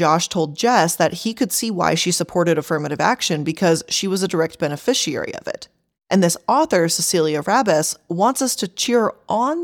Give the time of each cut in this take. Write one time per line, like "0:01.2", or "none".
none